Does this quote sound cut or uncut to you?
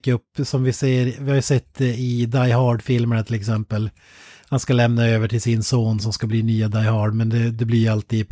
uncut